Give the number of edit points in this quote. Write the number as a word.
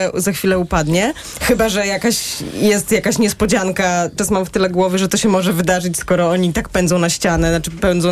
one